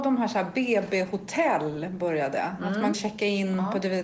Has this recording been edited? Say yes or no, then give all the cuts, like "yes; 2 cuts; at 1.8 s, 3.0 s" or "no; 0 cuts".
yes; 1 cut; at 2.9 s